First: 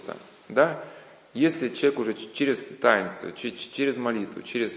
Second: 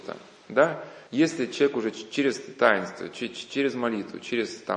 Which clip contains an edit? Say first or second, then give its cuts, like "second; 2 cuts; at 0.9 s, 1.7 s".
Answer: second; 1 cut; at 1.1 s